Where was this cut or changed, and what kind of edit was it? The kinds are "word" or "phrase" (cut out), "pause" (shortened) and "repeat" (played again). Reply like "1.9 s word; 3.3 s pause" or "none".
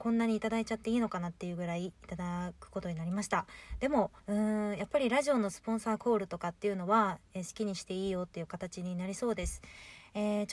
4.2 s pause